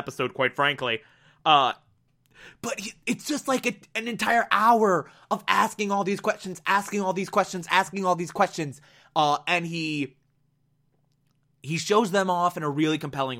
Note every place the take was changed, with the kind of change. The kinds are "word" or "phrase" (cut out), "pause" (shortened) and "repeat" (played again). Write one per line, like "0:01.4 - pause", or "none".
none